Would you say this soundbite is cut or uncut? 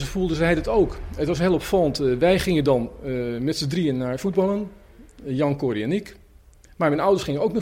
uncut